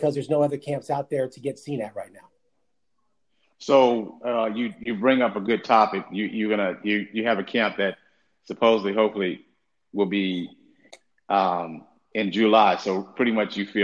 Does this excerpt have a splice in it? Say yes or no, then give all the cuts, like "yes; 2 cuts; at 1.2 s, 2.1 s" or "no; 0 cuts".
no; 0 cuts